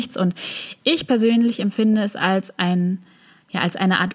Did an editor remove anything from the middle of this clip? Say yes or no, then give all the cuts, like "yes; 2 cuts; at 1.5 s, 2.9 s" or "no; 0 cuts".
no; 0 cuts